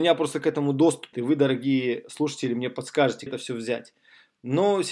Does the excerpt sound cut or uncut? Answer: cut